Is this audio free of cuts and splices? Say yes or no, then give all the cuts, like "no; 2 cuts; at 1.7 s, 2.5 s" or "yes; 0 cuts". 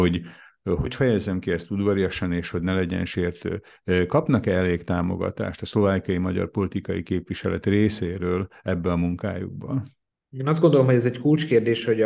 no; 1 cut; at 10.1 s